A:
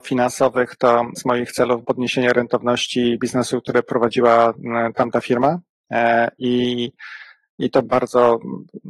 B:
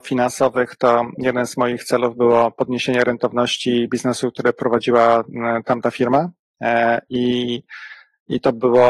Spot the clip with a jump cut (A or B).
A